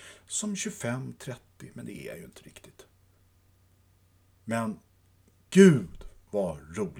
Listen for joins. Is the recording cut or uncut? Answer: uncut